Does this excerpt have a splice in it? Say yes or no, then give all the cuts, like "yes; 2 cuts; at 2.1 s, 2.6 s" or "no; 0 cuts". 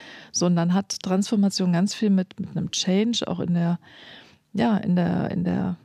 no; 0 cuts